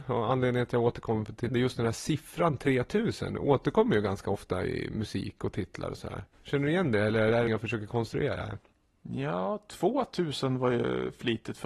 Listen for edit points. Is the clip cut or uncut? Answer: cut